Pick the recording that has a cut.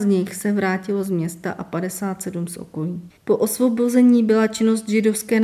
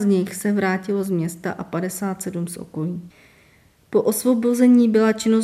first; 1 cut; at 3.2 s

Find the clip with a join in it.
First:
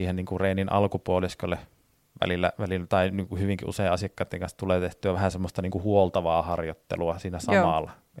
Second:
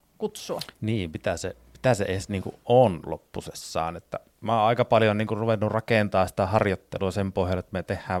second; 1 cut; at 4.3 s

